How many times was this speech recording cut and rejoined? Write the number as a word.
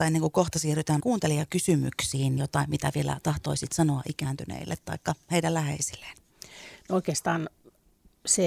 two